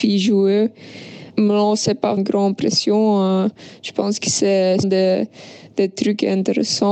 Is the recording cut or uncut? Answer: cut